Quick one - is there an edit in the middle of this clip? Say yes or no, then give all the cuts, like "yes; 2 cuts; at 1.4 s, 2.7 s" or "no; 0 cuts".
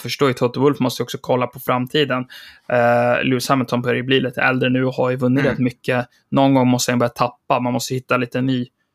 no; 0 cuts